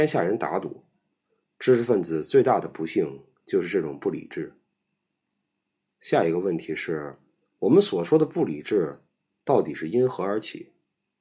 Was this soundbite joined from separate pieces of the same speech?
no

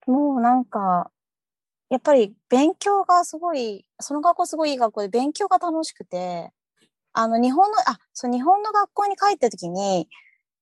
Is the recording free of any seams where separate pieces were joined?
yes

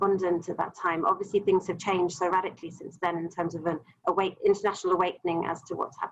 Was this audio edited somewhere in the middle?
no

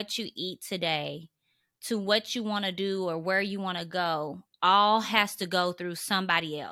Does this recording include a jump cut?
no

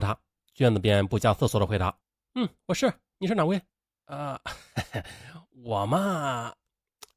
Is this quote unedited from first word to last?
yes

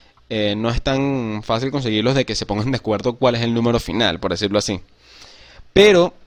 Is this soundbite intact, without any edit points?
yes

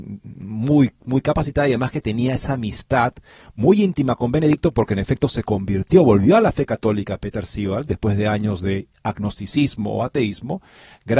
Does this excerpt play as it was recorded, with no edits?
yes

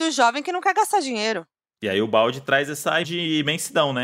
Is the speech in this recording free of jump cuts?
no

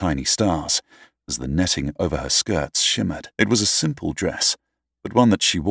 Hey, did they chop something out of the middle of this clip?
yes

